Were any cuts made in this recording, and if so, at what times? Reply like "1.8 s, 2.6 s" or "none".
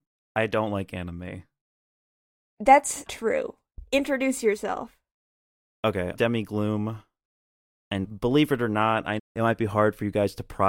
3.1 s, 6.1 s, 8.0 s, 9.2 s